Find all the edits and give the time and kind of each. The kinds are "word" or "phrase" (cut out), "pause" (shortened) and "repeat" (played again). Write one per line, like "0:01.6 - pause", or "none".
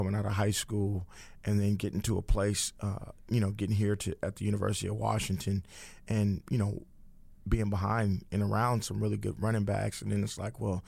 none